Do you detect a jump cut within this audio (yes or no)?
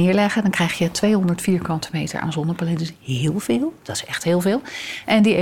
no